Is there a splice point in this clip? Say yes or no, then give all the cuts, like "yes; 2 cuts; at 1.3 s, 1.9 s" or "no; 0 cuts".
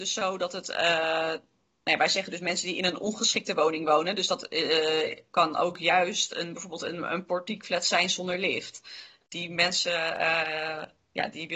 no; 0 cuts